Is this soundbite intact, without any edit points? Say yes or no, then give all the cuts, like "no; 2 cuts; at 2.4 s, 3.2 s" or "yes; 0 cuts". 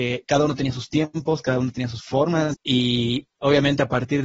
no; 1 cut; at 2.5 s